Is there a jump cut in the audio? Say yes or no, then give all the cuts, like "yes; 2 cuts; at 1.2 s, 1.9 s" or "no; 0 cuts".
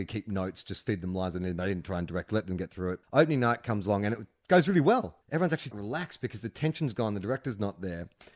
yes; 4 cuts; at 2.3 s, 3.0 s, 5.2 s, 5.7 s